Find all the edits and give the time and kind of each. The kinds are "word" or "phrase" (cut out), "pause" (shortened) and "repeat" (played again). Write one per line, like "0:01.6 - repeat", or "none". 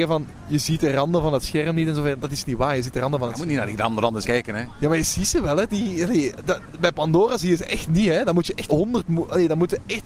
0:02.2 - word
0:04.2 - word
0:05.7 - word
0:08.7 - word